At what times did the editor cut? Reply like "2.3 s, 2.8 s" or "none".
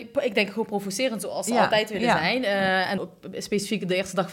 3.0 s